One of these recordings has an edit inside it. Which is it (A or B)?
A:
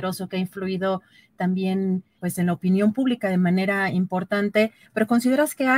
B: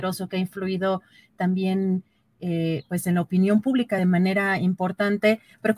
A